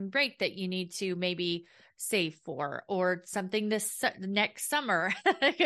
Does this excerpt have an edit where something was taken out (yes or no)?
no